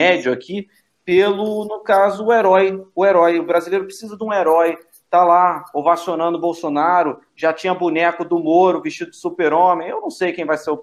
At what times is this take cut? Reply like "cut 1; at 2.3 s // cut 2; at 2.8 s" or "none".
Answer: none

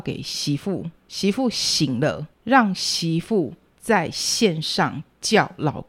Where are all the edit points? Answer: cut 1; at 1.0 s // cut 2; at 2.3 s // cut 3; at 3.7 s

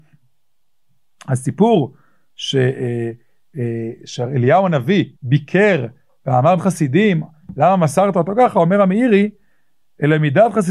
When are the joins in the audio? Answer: cut 1; at 5.2 s // cut 2; at 6.6 s

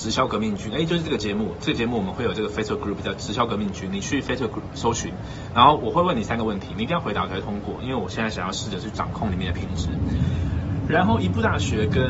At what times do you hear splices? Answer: none

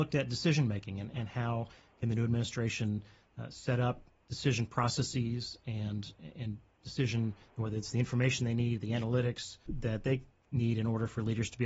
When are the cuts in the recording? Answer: cut 1; at 9.7 s

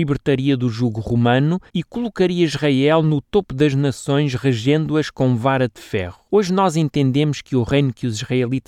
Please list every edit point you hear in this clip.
cut 1; at 1.7 s // cut 2; at 6.3 s

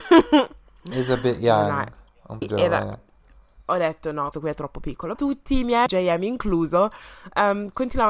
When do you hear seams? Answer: cut 1; at 2.4 s // cut 2; at 4.3 s // cut 3; at 5.1 s // cut 4; at 5.9 s

